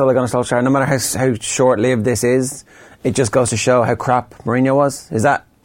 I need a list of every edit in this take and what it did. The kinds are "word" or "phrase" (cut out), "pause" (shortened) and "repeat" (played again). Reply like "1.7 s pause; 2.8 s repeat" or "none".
none

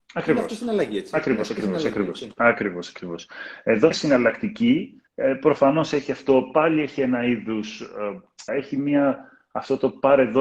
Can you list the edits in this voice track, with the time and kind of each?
3.9 s word; 5.1 s pause; 8.5 s phrase

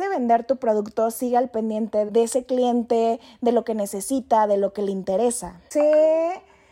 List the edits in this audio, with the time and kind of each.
2.1 s word

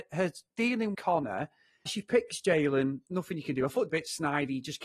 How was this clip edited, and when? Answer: 0.9 s word; 1.9 s phrase; 3.9 s phrase

